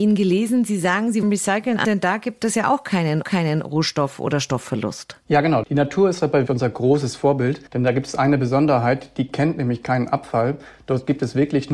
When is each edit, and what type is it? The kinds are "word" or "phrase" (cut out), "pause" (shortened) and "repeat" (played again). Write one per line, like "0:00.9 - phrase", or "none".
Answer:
0:01.2 - phrase
0:01.8 - phrase
0:03.2 - repeat
0:06.5 - word
0:07.7 - pause